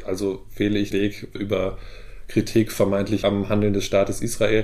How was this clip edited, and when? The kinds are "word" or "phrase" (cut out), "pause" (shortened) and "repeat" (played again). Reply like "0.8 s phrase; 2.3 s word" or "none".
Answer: 0.9 s word; 1.4 s word; 3.2 s word